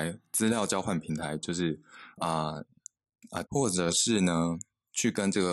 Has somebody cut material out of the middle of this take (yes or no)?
yes